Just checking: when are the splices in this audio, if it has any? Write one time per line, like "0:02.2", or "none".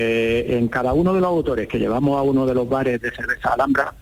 0:03.0